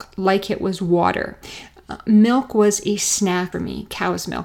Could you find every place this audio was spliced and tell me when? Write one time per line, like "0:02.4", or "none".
0:03.5